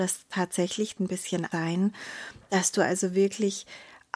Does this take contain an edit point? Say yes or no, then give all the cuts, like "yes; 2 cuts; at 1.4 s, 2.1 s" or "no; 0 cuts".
yes; 2 cuts; at 1.0 s, 1.5 s